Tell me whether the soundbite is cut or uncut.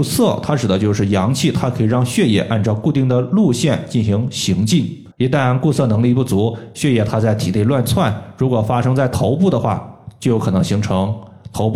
cut